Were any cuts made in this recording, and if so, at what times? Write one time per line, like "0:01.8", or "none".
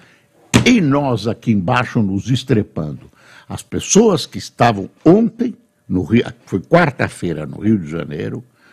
none